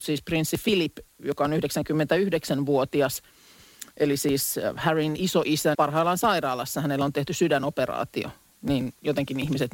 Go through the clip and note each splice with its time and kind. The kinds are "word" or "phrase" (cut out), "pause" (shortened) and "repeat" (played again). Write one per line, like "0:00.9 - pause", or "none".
0:05.7 - word